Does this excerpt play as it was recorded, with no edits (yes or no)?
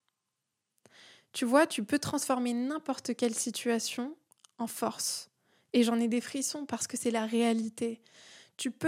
yes